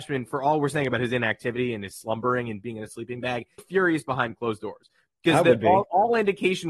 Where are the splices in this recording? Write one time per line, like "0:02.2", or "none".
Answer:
0:03.6